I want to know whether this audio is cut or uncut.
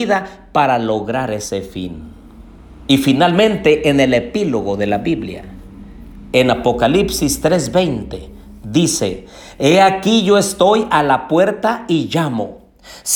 uncut